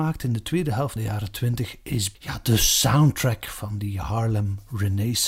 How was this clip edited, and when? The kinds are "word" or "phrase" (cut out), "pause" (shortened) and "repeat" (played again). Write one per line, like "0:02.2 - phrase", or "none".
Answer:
0:01.0 - word
0:02.1 - word